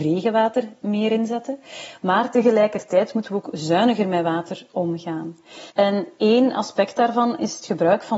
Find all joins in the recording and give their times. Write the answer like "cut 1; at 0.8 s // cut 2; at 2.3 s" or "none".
cut 1; at 5.7 s